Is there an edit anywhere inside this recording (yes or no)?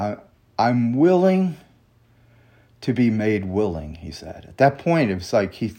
no